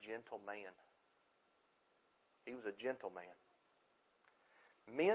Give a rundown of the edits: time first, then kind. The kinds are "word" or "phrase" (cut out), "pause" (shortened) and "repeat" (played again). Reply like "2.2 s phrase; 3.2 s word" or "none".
none